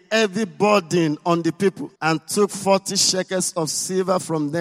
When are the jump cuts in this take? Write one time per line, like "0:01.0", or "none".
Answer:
0:02.0